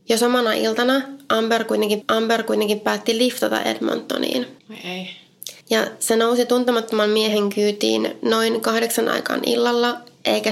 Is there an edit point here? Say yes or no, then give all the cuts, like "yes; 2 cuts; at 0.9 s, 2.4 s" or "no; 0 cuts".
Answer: yes; 3 cuts; at 2.0 s, 4.6 s, 5.6 s